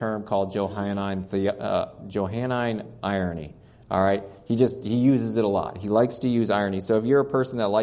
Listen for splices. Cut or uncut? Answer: uncut